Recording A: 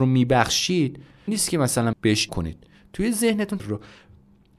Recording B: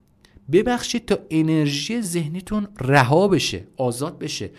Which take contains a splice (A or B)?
A